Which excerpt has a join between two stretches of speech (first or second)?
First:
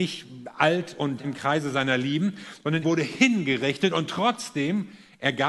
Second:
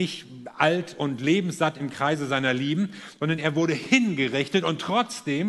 first